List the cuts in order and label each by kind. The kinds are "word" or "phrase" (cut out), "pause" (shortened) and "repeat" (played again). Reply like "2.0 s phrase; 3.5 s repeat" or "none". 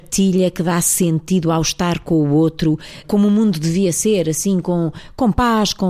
3.0 s word

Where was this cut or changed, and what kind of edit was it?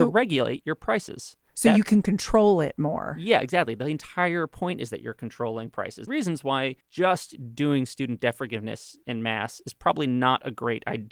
6.1 s phrase; 6.8 s pause

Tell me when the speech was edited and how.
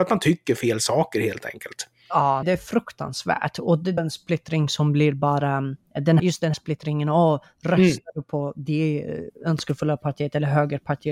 2.4 s word; 4.0 s phrase; 6.2 s word; 6.5 s word

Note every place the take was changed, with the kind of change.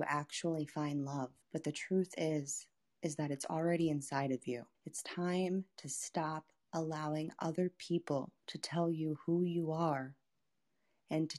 1.4 s pause; 2.8 s pause; 4.7 s pause; 8.4 s pause

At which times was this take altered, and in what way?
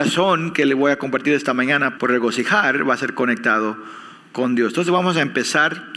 2.0 s word

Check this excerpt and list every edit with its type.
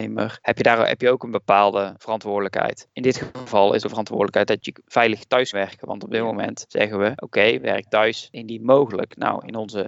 3.8 s word; 4.8 s word; 5.5 s word

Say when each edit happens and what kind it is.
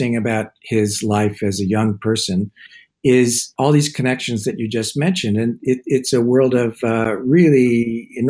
none

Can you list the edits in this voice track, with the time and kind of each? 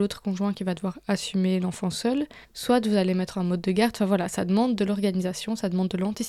2.4 s pause; 3.3 s phrase

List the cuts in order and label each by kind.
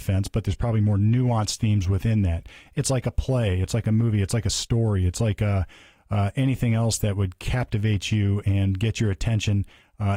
none

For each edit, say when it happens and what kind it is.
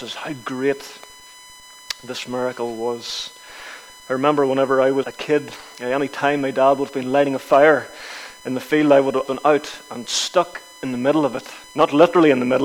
5.0 s word; 9.3 s word; 11.7 s pause

